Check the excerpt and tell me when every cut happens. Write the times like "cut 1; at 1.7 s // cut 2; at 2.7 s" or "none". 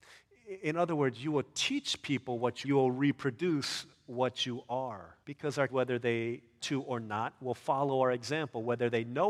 cut 1; at 2.6 s // cut 2; at 5.2 s // cut 3; at 5.7 s // cut 4; at 6.6 s